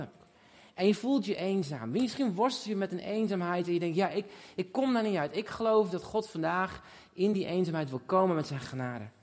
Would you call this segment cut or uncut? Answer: uncut